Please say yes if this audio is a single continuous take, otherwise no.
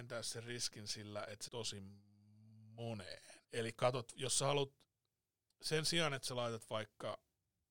no